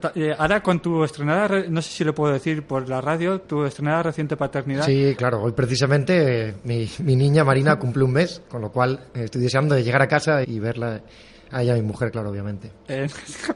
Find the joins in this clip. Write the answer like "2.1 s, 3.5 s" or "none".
5.2 s, 10.4 s